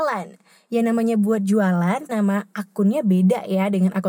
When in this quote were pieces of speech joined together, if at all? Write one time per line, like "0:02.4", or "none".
0:02.1

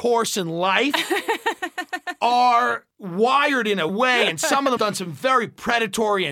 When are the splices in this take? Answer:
0:02.9
0:03.9
0:04.8

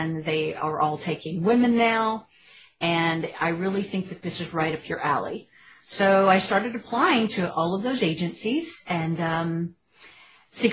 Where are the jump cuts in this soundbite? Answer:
none

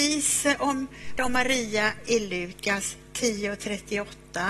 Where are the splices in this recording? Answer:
0:01.2

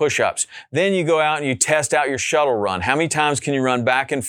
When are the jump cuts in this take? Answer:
none

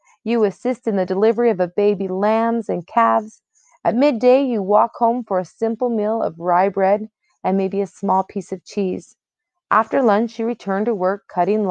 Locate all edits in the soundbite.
none

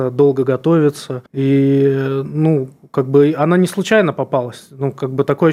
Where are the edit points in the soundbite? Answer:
0:01.3

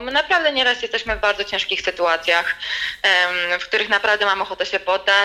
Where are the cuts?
none

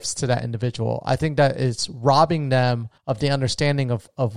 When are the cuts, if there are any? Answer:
0:03.0

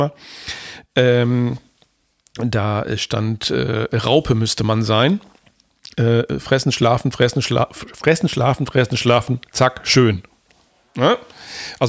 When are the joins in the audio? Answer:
none

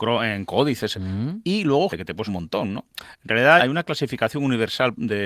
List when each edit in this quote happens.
0:00.9
0:01.9
0:02.3
0:03.6

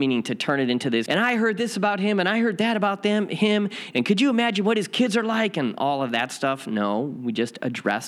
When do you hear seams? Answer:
0:01.1

